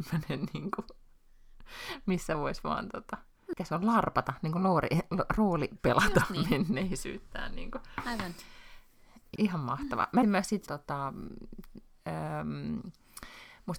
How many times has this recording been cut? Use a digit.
4